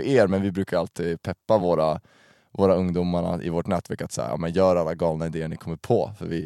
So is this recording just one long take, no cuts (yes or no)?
yes